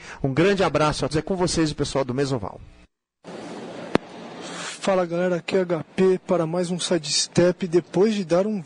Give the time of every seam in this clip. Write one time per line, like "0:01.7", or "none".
0:01.1

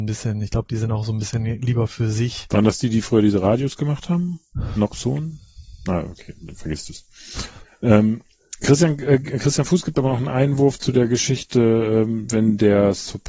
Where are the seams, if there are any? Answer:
none

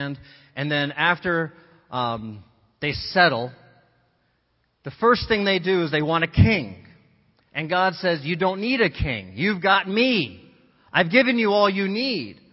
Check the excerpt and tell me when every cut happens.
none

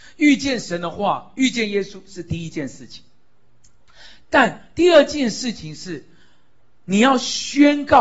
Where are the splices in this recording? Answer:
none

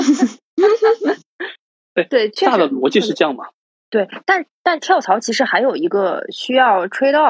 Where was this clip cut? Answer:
none

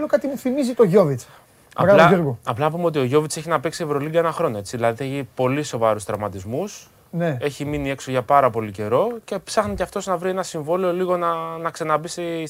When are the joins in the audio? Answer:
none

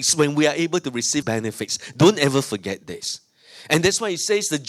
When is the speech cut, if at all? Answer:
0:01.2

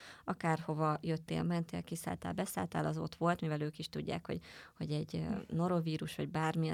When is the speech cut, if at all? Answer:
none

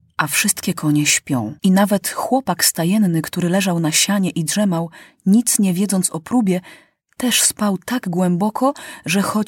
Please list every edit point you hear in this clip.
0:01.6

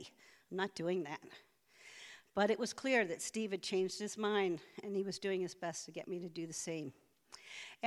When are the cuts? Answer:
none

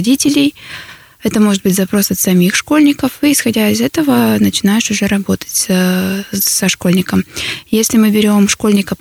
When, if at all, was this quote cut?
none

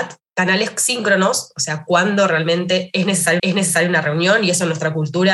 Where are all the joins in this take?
0:03.4

